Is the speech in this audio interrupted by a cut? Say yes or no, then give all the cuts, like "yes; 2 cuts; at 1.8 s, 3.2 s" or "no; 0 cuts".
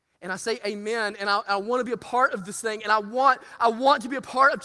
no; 0 cuts